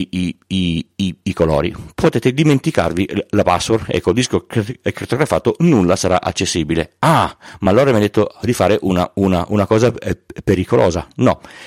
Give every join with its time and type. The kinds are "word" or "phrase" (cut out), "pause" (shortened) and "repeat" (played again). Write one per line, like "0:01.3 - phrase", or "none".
none